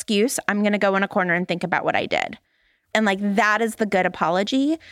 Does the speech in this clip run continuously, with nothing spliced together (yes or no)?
yes